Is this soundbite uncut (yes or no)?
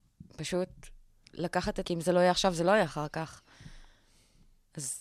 no